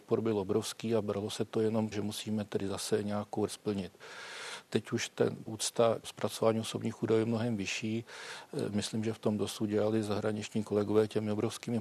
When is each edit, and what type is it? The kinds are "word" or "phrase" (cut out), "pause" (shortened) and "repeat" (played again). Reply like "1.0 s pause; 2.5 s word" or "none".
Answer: 1.9 s word; 3.5 s word; 5.5 s word; 6.0 s word